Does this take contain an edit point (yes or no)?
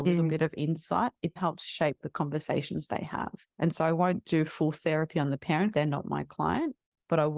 yes